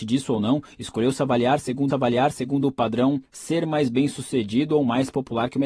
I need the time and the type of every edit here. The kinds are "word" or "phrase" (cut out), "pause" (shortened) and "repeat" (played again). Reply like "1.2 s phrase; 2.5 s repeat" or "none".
1.9 s repeat; 3.2 s pause

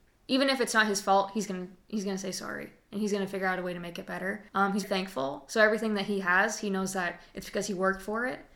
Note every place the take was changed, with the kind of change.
4.5 s pause; 4.8 s word

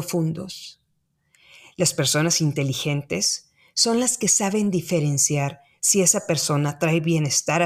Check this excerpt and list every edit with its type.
none

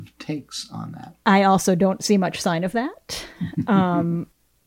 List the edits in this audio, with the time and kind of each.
1.2 s pause

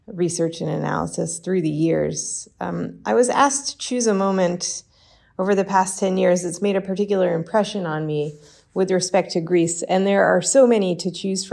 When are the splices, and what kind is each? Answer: none

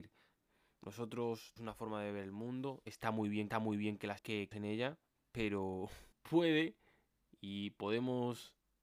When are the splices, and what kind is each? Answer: 1.6 s word; 3.5 s repeat; 4.2 s word; 4.5 s word; 6.1 s pause

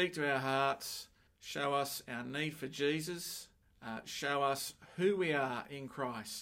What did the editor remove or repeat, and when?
1.3 s pause; 3.6 s pause

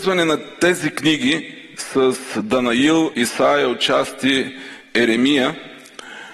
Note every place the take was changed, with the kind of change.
3.1 s word

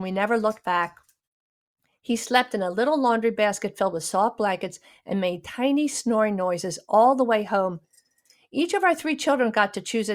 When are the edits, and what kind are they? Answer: none

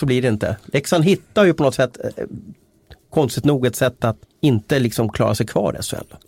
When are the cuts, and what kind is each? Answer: 4.2 s pause

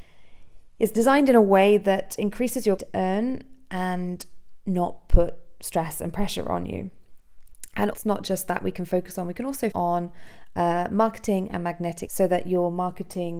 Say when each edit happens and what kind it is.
2.8 s word; 7.9 s word; 9.7 s word; 12.1 s word

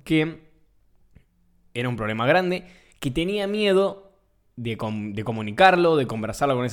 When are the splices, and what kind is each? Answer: none

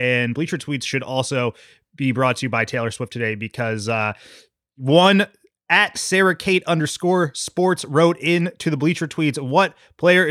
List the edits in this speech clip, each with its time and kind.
none

